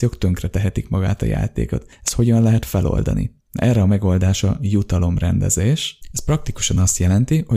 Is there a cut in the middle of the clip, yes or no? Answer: no